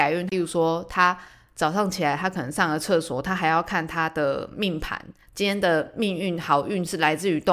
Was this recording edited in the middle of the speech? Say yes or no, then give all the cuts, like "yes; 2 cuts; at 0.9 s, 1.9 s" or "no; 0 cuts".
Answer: no; 0 cuts